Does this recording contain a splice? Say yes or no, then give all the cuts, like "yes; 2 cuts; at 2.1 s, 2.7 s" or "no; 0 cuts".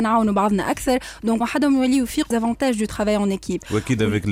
yes; 2 cuts; at 1.4 s, 2.3 s